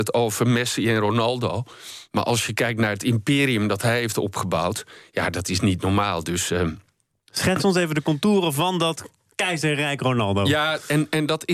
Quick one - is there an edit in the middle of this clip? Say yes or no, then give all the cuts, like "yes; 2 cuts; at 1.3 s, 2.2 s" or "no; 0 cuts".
no; 0 cuts